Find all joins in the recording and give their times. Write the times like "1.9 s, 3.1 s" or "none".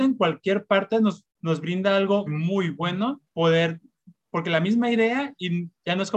1.3 s, 2.3 s, 3.3 s